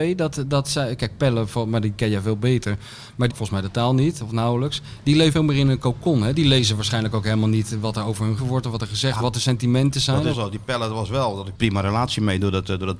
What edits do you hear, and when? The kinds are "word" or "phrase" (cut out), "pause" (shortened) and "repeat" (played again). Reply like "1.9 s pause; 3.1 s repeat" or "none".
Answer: 3.3 s word; 5.3 s word; 8.4 s word; 9.2 s word; 10.3 s word; 11.5 s word

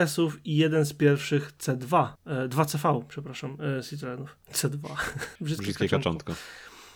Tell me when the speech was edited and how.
2.2 s pause; 4.4 s pause; 5.4 s pause

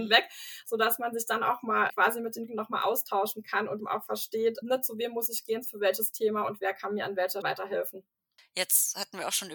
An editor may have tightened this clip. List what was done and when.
1.9 s word; 2.5 s word; 3.8 s word; 4.6 s word; 7.4 s word

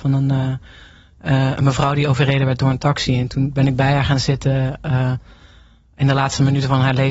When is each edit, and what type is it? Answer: none

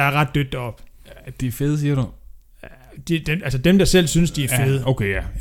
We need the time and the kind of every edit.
none

